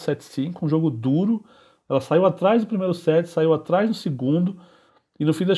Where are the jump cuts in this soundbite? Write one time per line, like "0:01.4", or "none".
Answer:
none

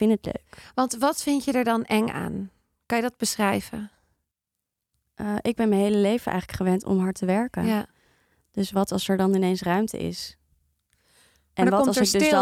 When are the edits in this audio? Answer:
none

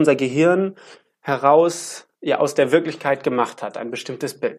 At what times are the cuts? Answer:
none

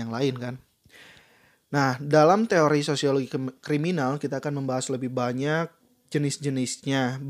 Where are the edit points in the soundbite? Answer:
none

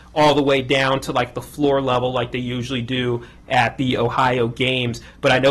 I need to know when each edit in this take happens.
none

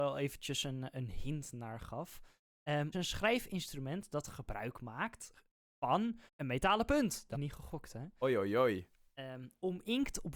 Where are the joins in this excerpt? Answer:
0:02.9
0:06.3
0:07.3

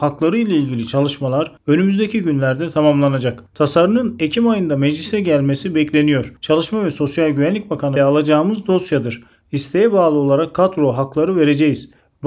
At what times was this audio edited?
0:08.0

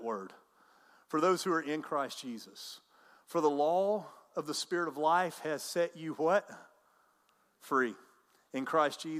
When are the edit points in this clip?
none

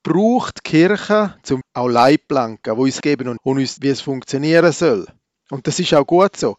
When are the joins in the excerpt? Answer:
0:01.6
0:03.0
0:03.4
0:03.8

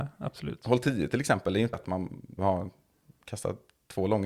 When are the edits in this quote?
0:01.7
0:02.4

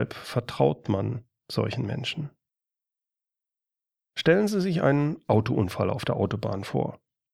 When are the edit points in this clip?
none

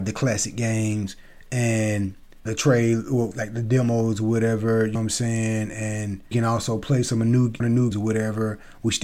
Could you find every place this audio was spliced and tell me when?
0:02.5
0:03.3
0:05.0
0:06.3
0:07.6
0:07.9

